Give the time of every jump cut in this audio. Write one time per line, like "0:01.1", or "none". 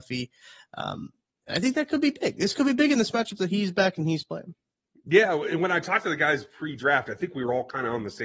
none